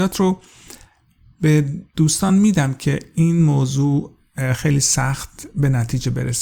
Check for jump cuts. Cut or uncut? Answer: uncut